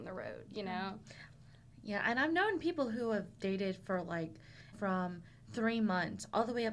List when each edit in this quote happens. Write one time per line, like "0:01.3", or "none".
0:04.7